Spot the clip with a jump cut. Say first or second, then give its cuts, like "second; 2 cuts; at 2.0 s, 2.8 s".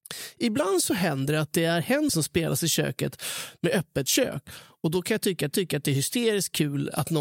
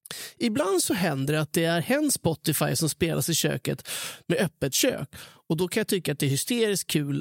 first; 2 cuts; at 2.1 s, 5.5 s